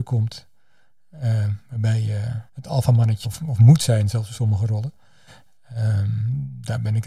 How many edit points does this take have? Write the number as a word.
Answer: two